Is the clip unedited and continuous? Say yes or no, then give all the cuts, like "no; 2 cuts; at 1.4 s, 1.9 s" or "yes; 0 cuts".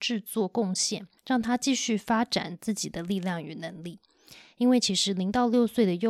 no; 1 cut; at 1.2 s